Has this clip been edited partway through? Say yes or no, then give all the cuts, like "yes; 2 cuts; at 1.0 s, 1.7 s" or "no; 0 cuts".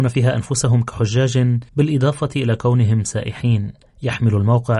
yes; 2 cuts; at 1.7 s, 3.9 s